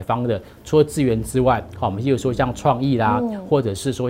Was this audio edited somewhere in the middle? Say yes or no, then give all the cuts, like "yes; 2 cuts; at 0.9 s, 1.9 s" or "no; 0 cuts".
no; 0 cuts